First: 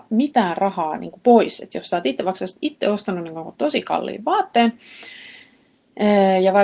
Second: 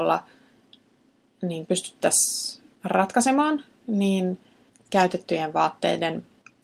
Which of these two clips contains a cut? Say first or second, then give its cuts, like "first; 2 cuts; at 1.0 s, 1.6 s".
second; 3 cuts; at 1.7 s, 2.7 s, 4.7 s